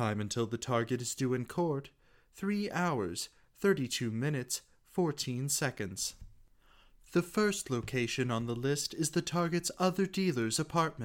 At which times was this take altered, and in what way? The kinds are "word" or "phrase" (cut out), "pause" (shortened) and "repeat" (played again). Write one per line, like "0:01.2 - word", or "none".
none